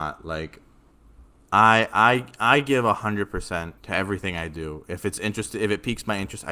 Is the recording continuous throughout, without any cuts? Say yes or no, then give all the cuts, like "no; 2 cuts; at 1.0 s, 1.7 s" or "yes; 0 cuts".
no; 2 cuts; at 1.4 s, 3.8 s